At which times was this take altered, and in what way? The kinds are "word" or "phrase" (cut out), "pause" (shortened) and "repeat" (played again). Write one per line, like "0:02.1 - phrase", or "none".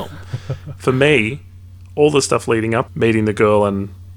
0:02.9 - phrase